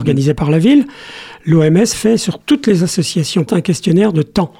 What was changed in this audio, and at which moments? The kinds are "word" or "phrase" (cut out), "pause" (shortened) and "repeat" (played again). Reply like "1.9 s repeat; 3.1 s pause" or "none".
1.9 s word; 3.5 s word